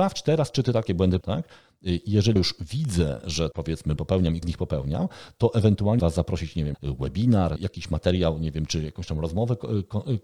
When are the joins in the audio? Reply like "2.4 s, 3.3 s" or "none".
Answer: 1.2 s, 2.4 s, 3.5 s, 4.0 s, 4.4 s, 6.0 s, 6.7 s, 7.6 s